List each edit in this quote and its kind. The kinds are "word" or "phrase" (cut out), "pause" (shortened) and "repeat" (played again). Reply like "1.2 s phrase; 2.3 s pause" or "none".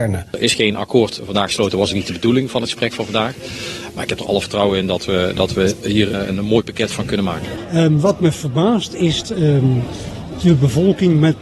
6.1 s word; 9.2 s word